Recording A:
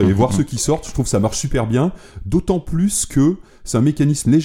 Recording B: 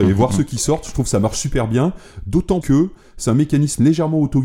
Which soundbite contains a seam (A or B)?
B